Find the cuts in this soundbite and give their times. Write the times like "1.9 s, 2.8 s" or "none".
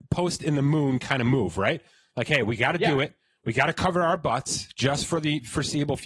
none

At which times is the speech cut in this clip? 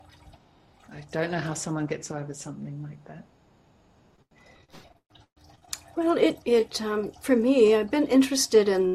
6.4 s

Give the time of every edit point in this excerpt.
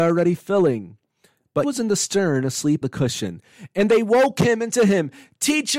1.6 s, 2.8 s, 4.7 s

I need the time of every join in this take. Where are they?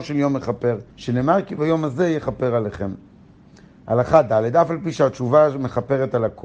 0.9 s

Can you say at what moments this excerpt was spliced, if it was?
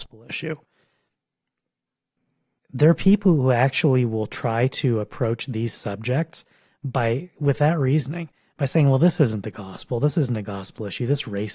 none

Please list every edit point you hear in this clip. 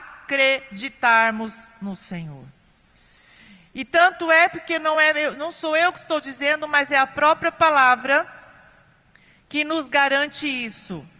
none

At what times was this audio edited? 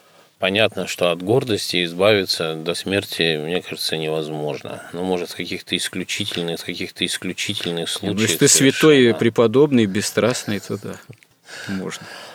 2.7 s, 6.6 s

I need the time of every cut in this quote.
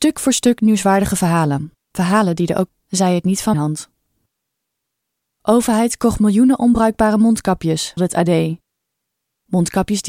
1.8 s, 2.7 s, 3.5 s, 8.0 s

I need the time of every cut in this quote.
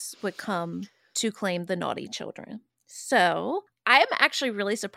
none

